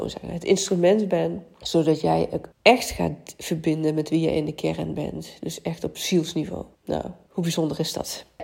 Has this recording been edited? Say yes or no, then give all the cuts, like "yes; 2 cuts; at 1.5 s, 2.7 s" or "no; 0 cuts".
yes; 2 cuts; at 2.5 s, 6.7 s